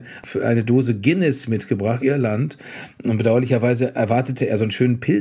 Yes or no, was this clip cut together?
yes